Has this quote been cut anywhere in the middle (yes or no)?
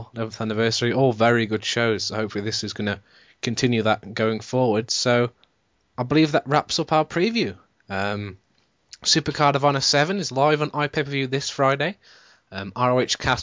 no